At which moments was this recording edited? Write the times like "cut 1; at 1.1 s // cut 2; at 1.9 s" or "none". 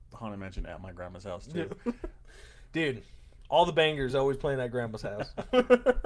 none